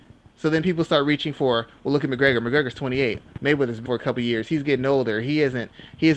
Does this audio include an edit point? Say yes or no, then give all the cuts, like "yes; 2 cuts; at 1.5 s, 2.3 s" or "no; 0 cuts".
yes; 1 cut; at 3.9 s